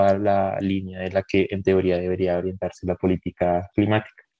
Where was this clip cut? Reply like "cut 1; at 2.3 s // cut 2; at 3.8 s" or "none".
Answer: none